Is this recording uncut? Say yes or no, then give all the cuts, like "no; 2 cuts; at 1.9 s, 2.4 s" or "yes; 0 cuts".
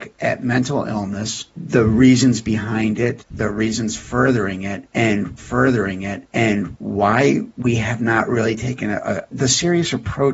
no; 2 cuts; at 5.4 s, 9.3 s